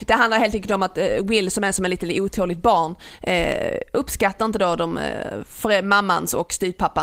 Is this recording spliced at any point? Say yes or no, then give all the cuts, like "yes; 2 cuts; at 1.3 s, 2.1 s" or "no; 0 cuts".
no; 0 cuts